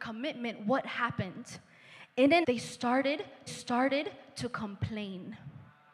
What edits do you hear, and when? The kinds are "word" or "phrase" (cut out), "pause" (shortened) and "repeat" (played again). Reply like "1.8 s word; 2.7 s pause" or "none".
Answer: 2.4 s word; 3.5 s repeat